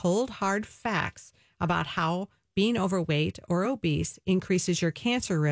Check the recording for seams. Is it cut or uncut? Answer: uncut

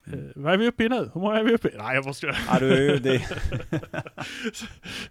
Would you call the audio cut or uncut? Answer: uncut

